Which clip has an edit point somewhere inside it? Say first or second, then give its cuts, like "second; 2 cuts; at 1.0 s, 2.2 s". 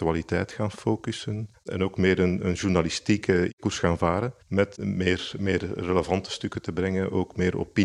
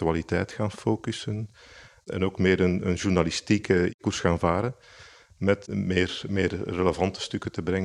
first; 2 cuts; at 1.5 s, 4.4 s